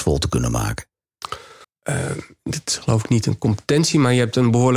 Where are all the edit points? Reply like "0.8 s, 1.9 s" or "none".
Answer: 1.6 s